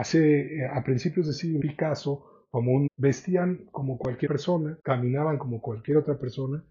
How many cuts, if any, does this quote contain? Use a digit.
4